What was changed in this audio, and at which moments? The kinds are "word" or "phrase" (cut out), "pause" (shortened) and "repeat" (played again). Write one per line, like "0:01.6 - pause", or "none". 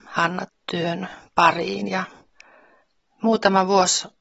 none